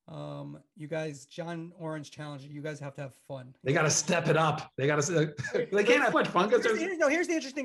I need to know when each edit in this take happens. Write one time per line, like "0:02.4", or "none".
0:06.1